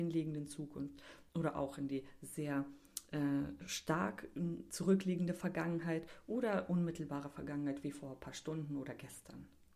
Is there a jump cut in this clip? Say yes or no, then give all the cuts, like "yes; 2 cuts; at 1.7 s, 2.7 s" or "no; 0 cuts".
no; 0 cuts